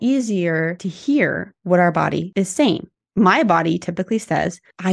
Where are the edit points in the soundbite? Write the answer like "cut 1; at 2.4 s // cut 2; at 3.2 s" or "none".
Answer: none